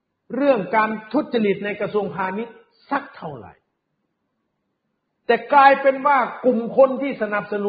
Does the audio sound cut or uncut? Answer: uncut